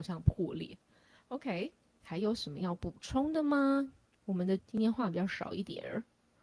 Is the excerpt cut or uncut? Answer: cut